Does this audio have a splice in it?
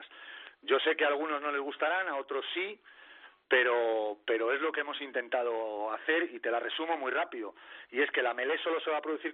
no; 0 cuts

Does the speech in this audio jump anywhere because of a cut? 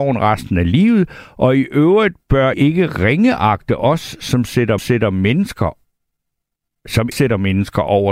yes; 3 cuts; at 2.5 s, 4.8 s, 7.1 s

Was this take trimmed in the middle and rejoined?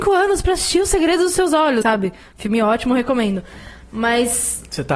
yes; 1 cut; at 1.8 s

